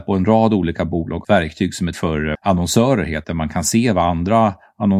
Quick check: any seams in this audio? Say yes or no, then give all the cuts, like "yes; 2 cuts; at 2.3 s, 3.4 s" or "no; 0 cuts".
yes; 4 cuts; at 1.2 s, 1.9 s, 2.3 s, 3.2 s